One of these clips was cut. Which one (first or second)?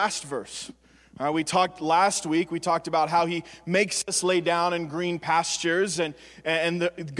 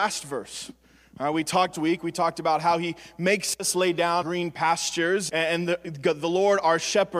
second